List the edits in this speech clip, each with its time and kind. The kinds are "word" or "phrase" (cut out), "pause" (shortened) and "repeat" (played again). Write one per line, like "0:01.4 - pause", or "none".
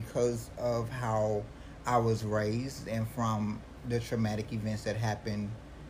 none